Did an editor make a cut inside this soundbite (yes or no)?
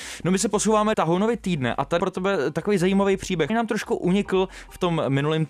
yes